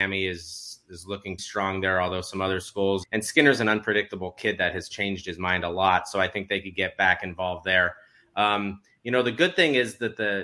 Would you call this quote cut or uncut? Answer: cut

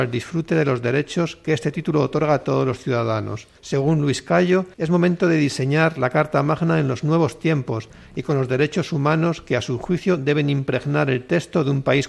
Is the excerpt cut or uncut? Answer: cut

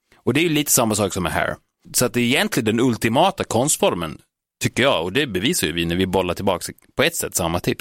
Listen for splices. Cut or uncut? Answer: uncut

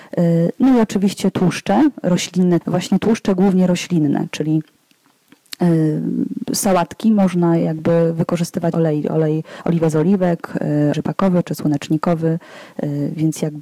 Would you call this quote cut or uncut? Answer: cut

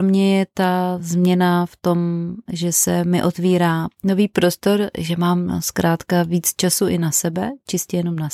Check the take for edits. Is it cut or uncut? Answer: uncut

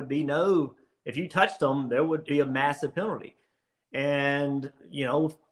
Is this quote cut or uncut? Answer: cut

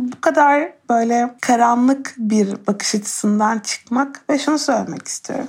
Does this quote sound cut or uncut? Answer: cut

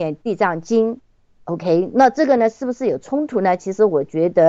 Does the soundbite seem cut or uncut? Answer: uncut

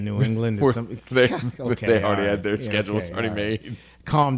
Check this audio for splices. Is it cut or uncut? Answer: uncut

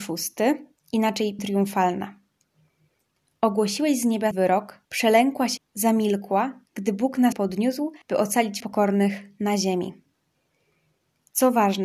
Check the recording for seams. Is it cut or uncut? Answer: cut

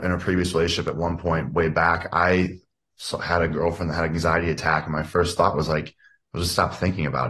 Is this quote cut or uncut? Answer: uncut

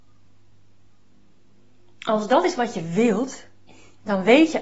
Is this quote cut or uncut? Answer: uncut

